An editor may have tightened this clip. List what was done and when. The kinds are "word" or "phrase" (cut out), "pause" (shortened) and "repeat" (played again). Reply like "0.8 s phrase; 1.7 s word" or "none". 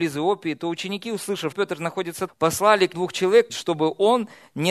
1.5 s word; 2.3 s word; 2.9 s word; 3.5 s word